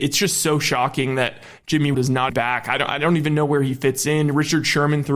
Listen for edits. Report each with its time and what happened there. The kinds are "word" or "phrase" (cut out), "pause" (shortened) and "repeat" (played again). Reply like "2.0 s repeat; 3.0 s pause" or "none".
1.9 s word; 2.3 s word